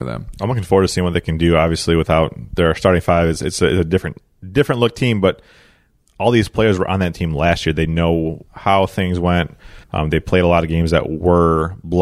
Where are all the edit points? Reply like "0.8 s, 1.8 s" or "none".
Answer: 8.5 s, 9.8 s